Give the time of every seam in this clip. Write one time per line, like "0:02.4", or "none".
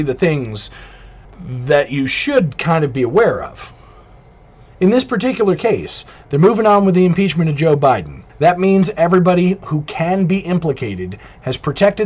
0:01.2
0:08.3